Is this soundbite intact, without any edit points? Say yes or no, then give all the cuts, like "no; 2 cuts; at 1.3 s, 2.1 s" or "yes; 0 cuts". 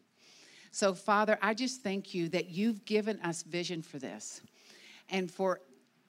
yes; 0 cuts